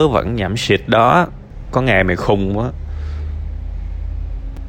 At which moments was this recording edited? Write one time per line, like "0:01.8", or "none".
none